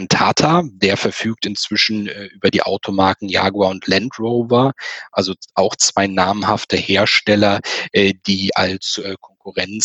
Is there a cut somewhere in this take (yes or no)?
no